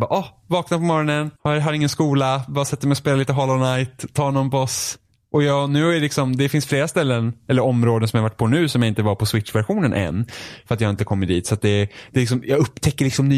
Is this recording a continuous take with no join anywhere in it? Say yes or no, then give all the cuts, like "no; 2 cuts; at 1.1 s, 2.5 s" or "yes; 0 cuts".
no; 1 cut; at 1.4 s